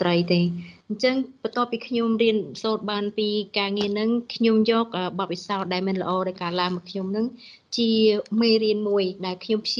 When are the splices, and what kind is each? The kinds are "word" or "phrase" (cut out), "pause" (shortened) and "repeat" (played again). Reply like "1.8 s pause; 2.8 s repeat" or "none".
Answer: none